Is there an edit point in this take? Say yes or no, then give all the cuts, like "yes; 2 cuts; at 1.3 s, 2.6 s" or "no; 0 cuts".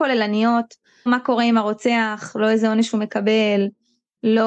yes; 1 cut; at 1.1 s